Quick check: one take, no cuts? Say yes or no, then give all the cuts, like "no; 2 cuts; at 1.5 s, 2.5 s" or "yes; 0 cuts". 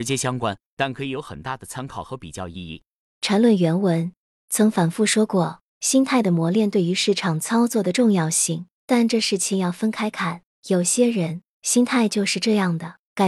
no; 1 cut; at 4.4 s